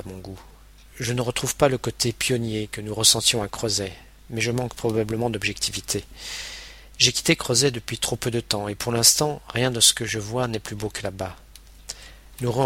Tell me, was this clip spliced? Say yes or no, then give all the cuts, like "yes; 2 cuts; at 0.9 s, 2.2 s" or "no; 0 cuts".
no; 0 cuts